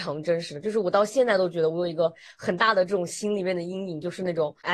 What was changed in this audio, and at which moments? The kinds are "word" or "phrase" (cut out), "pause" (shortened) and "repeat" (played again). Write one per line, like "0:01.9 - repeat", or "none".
none